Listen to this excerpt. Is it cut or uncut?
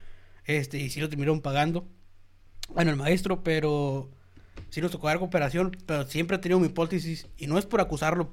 uncut